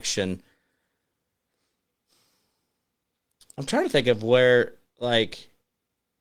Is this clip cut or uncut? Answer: uncut